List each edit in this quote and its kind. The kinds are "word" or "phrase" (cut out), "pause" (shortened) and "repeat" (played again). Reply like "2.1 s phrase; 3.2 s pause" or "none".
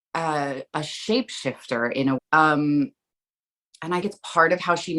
2.2 s word; 4.0 s word